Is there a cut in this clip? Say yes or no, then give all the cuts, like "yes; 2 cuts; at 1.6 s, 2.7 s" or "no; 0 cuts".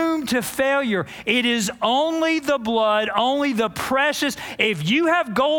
no; 0 cuts